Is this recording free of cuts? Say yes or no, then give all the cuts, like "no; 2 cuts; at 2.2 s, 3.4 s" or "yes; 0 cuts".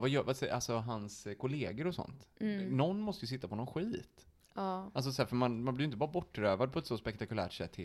yes; 0 cuts